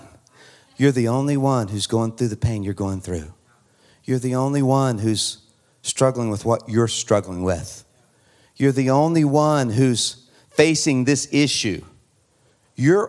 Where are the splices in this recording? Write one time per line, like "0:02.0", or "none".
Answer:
none

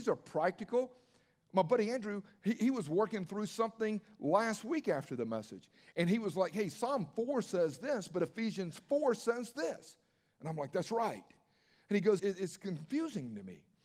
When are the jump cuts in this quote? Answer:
0:12.2

